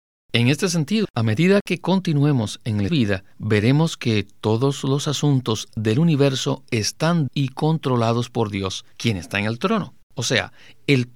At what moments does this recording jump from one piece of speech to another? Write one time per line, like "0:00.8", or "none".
0:01.0
0:02.9
0:03.3
0:07.3
0:08.9
0:10.0